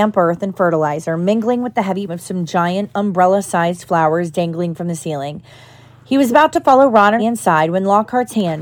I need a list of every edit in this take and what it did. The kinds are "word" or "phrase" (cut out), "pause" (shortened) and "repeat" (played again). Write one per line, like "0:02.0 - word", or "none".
0:02.1 - word
0:07.2 - word